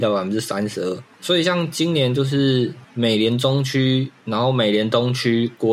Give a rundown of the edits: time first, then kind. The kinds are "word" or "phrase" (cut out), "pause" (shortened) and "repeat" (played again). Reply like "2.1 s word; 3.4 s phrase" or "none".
1.1 s pause; 2.8 s pause